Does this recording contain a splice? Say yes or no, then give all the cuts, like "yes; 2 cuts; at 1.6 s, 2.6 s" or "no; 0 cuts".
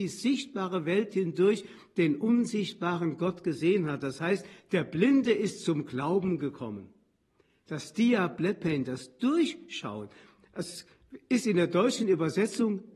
no; 0 cuts